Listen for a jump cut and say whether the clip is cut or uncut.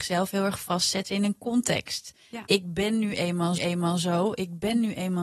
cut